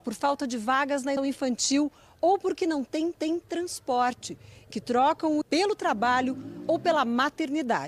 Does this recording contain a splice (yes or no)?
yes